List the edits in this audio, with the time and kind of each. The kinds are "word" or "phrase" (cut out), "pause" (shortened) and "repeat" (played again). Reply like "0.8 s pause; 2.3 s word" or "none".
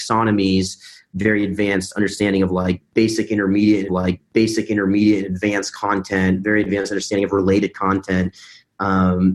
3.9 s repeat

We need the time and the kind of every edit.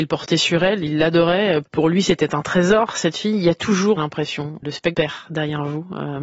4.0 s word; 4.9 s phrase

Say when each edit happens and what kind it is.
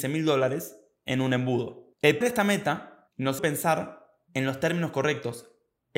2.2 s word; 3.4 s word

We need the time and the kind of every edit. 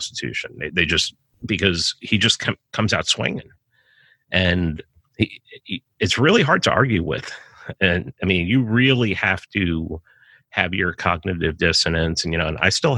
none

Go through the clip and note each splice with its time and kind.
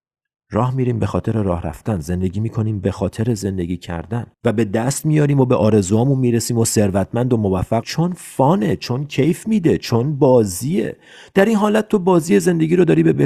4.3 s pause; 7.8 s word

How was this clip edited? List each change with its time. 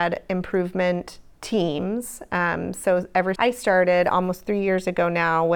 3.4 s word

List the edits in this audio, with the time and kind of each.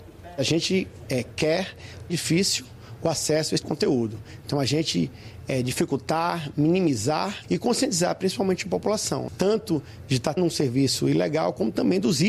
2.1 s phrase; 3.6 s word; 7.4 s word; 9.3 s word; 10.4 s word

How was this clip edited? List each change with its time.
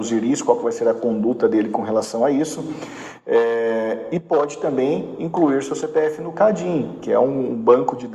none

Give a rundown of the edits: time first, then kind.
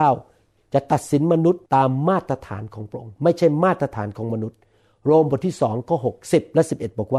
1.7 s pause; 6.2 s pause

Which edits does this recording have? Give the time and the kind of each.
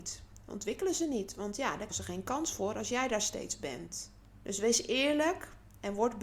1.9 s word; 4.4 s pause

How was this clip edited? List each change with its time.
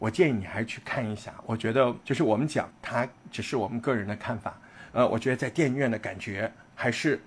2.0 s word; 2.7 s word

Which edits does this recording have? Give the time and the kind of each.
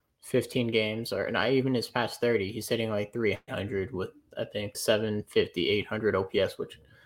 4.7 s phrase

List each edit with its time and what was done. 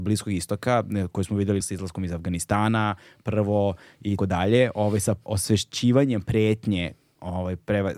1.6 s word; 4.2 s word; 5.3 s phrase

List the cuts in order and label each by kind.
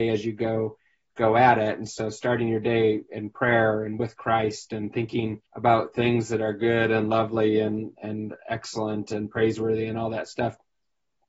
5.5 s pause

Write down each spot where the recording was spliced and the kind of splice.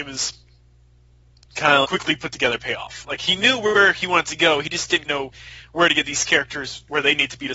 1.8 s word; 5.0 s word

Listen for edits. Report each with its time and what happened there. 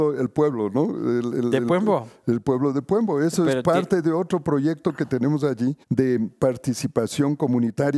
5.8 s pause

